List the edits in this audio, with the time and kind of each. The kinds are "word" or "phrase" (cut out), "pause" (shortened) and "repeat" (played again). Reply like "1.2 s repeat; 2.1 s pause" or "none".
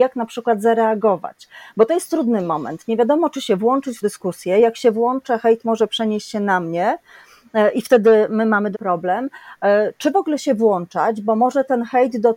4.0 s word; 8.7 s word